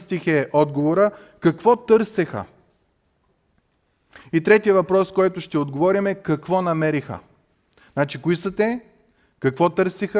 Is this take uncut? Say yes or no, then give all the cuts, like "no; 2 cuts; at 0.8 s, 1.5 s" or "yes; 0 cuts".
yes; 0 cuts